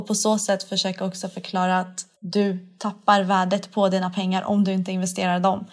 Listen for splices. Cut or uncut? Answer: cut